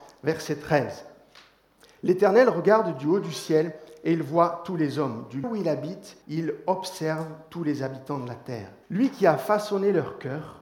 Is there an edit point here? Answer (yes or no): yes